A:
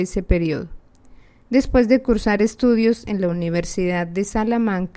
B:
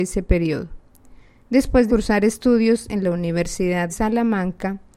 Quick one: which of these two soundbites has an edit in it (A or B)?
B